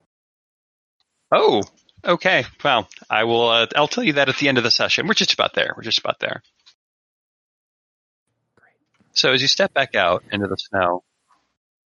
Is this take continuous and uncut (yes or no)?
yes